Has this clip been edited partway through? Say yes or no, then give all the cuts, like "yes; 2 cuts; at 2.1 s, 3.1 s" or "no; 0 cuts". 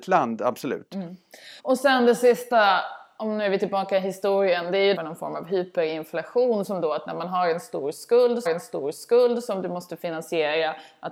yes; 3 cuts; at 1.6 s, 5.0 s, 8.5 s